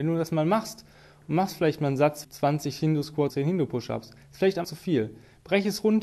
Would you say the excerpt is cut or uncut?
cut